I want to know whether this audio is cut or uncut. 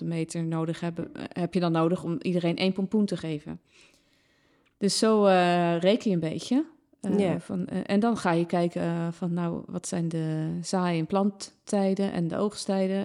uncut